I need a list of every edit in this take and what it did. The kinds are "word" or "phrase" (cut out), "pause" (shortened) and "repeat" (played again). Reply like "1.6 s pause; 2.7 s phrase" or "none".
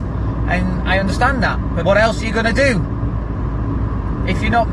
1.8 s word